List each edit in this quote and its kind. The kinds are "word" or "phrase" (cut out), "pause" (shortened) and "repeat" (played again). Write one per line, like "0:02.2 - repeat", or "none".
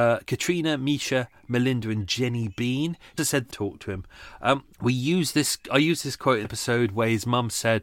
0:03.2 - word
0:03.5 - phrase
0:04.7 - pause
0:06.4 - word